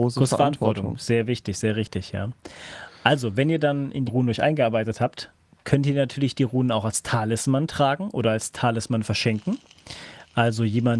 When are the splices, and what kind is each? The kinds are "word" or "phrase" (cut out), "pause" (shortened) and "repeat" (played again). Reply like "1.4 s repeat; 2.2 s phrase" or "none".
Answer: 4.1 s word